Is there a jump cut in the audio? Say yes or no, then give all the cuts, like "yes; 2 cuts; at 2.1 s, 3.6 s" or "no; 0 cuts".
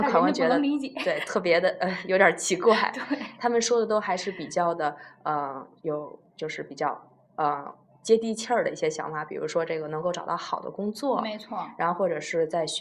no; 0 cuts